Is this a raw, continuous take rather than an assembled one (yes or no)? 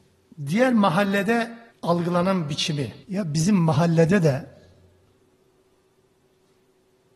no